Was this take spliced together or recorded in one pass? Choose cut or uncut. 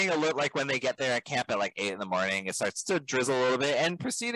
uncut